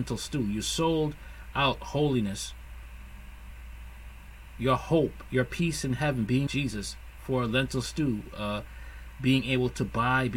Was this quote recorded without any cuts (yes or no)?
no